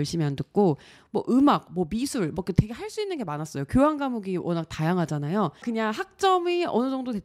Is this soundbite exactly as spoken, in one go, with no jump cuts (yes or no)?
yes